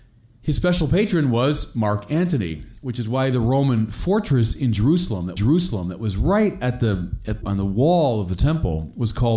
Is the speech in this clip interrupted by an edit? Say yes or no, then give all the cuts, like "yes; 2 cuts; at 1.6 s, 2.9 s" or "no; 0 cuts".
yes; 2 cuts; at 5.4 s, 7.4 s